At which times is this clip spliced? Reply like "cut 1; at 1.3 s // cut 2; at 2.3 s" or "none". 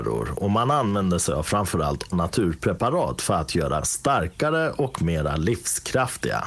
cut 1; at 2.1 s // cut 2; at 3.8 s